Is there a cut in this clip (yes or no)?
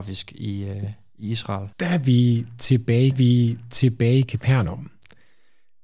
yes